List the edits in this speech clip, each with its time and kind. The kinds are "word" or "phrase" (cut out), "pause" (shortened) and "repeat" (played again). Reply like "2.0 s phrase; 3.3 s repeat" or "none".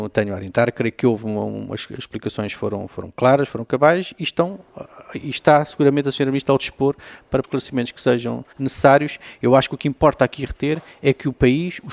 7.4 s phrase; 8.5 s pause